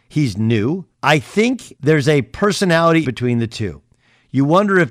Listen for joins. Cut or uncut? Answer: cut